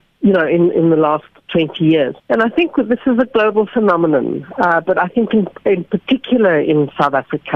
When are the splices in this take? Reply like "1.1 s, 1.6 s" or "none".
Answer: 2.2 s